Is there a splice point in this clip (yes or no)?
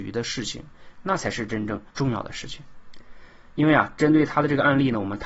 yes